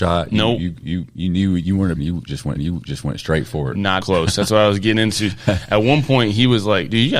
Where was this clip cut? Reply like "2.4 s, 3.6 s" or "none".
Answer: 2.0 s, 2.6 s, 4.0 s